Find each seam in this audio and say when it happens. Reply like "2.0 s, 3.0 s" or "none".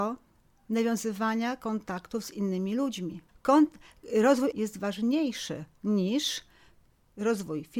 3.3 s, 4.5 s